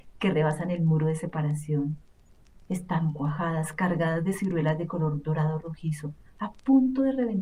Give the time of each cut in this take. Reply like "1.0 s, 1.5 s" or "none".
none